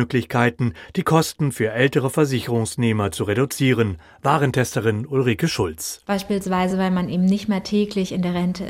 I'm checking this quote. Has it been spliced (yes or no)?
no